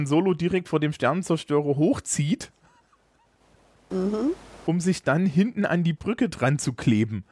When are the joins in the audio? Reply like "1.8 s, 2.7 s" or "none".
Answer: none